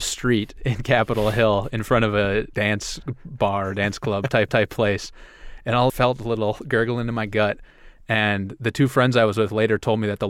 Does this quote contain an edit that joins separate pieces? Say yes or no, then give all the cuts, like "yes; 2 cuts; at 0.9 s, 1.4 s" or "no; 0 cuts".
yes; 3 cuts; at 2.5 s, 4.5 s, 5.9 s